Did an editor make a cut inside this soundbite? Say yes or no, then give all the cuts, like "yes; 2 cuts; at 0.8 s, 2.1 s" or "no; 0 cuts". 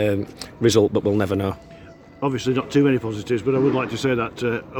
no; 0 cuts